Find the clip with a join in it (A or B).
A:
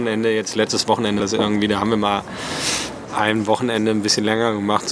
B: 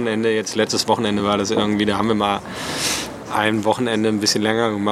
A